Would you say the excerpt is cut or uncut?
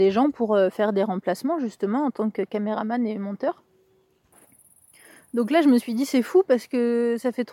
uncut